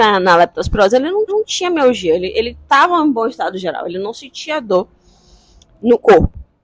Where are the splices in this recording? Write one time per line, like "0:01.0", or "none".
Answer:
0:01.3